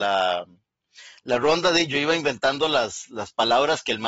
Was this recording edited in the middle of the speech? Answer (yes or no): no